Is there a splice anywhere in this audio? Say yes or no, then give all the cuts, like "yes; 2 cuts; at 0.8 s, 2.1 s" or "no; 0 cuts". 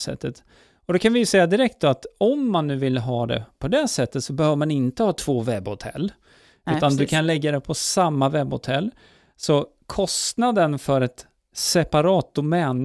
no; 0 cuts